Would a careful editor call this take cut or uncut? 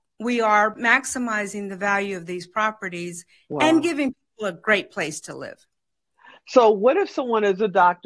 uncut